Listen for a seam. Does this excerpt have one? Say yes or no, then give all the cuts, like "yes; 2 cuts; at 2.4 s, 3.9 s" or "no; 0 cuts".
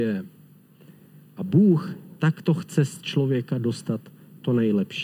no; 0 cuts